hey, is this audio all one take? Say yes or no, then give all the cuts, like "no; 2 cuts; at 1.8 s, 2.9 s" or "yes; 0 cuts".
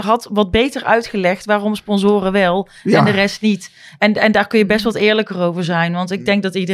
yes; 0 cuts